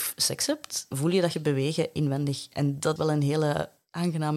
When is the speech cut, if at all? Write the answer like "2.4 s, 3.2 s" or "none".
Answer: 0.9 s, 1.3 s, 3.0 s